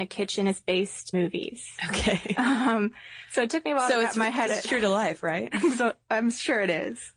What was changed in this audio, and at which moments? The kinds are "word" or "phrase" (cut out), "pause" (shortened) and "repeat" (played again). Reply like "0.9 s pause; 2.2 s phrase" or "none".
1.1 s word; 4.5 s word